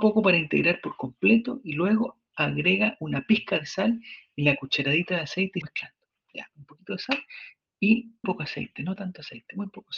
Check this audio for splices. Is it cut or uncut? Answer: cut